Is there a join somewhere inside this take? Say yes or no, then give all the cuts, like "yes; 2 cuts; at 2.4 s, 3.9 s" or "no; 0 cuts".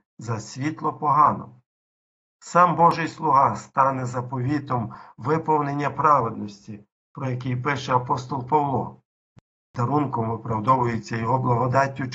no; 0 cuts